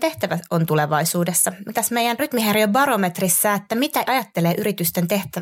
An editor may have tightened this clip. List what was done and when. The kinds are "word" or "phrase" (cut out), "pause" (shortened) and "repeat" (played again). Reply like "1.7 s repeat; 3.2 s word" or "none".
1.7 s word; 2.2 s word; 4.1 s word